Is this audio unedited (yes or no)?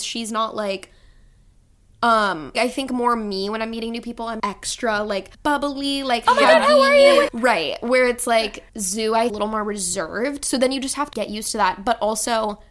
no